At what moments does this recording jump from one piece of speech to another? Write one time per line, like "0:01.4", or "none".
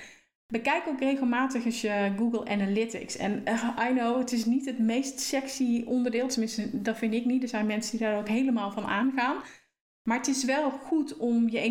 none